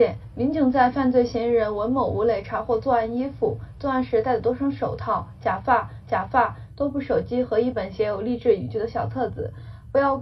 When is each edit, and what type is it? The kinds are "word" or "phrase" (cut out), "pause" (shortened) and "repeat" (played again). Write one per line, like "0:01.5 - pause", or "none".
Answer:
0:06.0 - repeat